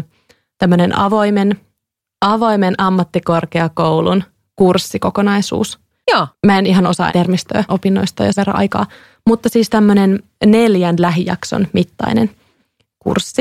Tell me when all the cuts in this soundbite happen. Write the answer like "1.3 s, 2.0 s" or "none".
7.1 s, 7.7 s, 8.3 s

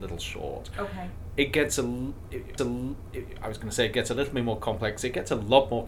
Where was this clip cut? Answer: 2.6 s

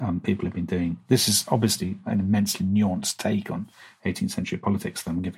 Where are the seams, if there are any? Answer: none

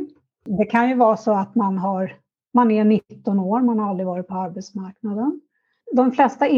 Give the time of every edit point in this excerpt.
none

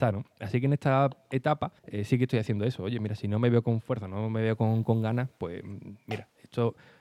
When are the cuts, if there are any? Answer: 1.8 s

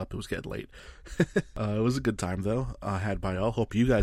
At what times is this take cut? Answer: none

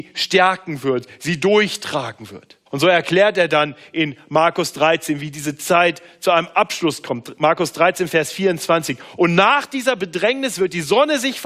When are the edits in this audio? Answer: 2.7 s

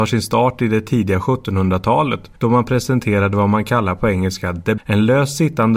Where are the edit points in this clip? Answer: 2.4 s, 4.8 s

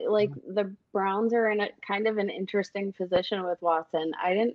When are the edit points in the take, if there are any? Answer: none

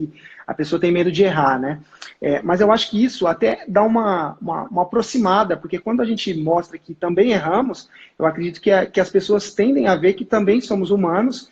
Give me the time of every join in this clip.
none

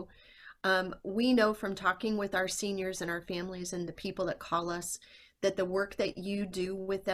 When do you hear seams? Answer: none

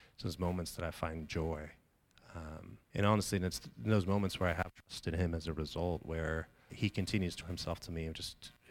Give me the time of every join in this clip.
2.8 s, 6.7 s, 7.4 s

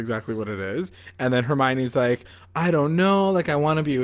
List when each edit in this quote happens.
none

